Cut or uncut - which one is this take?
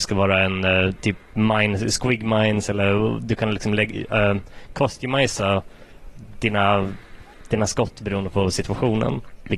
uncut